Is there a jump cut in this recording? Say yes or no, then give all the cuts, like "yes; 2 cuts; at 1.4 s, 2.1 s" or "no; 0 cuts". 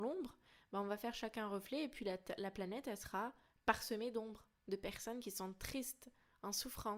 no; 0 cuts